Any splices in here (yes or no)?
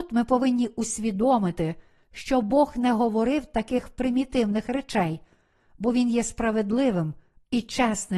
no